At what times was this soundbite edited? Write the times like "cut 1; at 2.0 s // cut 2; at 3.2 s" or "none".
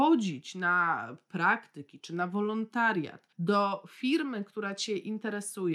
cut 1; at 3.3 s